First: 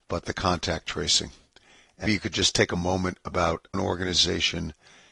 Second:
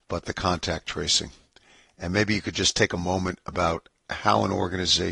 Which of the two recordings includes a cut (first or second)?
first